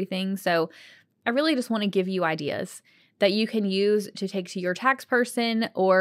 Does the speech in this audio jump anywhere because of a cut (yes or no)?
no